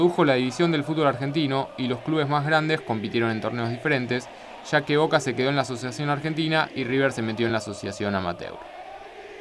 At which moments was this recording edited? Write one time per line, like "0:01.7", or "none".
none